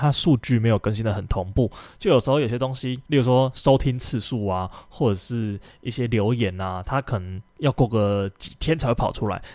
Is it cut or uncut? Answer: cut